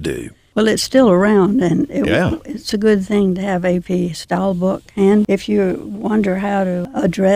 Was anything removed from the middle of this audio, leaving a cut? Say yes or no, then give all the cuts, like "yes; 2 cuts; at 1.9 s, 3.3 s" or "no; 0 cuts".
yes; 1 cut; at 2.7 s